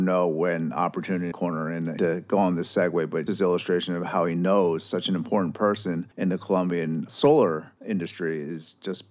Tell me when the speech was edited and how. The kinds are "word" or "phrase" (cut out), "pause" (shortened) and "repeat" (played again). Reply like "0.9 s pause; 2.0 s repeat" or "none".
1.3 s phrase; 2.0 s phrase; 3.3 s word; 6.1 s pause; 7.8 s pause